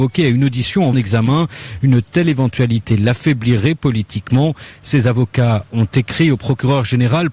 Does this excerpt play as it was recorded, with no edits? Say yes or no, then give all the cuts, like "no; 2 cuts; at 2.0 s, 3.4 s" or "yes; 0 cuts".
no; 1 cut; at 0.9 s